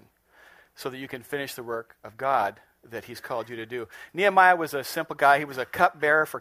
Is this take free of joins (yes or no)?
yes